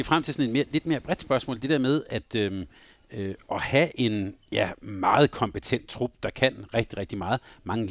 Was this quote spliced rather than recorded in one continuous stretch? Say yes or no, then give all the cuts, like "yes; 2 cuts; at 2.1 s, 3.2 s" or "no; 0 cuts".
no; 0 cuts